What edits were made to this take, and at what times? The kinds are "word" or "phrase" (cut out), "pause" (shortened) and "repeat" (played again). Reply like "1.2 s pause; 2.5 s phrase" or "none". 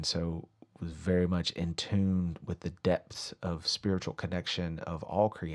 none

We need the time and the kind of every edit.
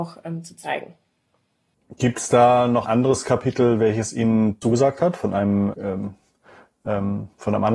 2.8 s word; 4.6 s word; 5.7 s word

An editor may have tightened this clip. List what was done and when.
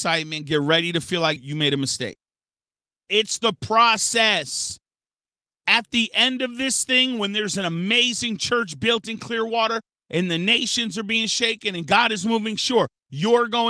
1.4 s word

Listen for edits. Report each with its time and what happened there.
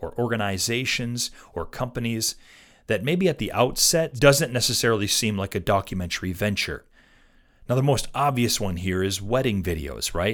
none

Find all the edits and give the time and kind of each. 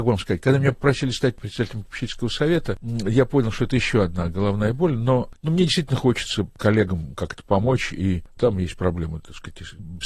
none

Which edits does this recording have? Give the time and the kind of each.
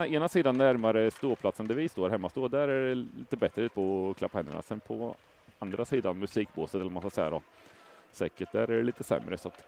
3.7 s word

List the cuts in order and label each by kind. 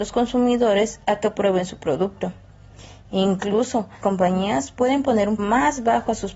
4.0 s word; 5.4 s word

